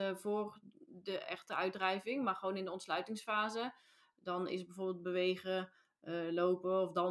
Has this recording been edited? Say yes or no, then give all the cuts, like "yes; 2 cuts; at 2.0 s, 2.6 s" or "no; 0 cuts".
no; 0 cuts